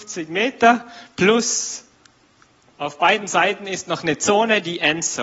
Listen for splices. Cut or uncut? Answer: uncut